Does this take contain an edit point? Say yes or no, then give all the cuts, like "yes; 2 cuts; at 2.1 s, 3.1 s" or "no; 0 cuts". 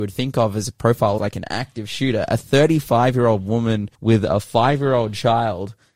yes; 2 cuts; at 1.2 s, 3.9 s